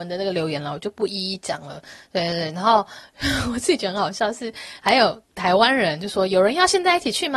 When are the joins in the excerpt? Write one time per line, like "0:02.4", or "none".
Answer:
0:05.3